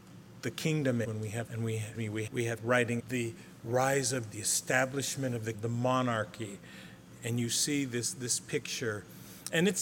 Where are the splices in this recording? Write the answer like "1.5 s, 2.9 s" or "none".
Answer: 1.0 s, 1.5 s, 1.9 s, 2.3 s, 2.6 s, 3.0 s, 4.3 s, 5.5 s